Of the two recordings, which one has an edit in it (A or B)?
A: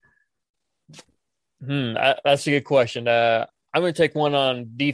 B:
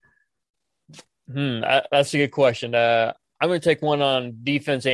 B